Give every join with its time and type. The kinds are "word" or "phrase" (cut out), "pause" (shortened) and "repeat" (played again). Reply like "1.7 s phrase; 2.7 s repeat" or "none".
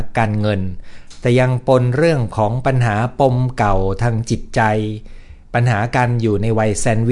5.4 s pause